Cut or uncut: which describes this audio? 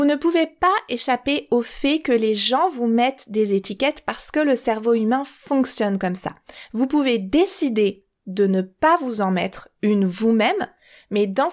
uncut